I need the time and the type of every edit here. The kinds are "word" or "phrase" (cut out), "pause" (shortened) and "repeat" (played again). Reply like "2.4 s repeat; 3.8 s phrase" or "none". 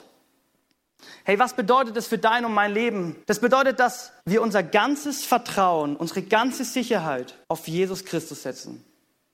3.2 s pause; 4.2 s pause; 7.4 s pause